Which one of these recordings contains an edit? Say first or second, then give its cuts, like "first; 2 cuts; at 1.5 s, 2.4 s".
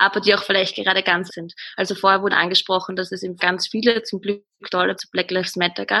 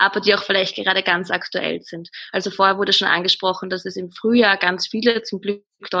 first; 4 cuts; at 1.3 s, 2.3 s, 3.4 s, 5.0 s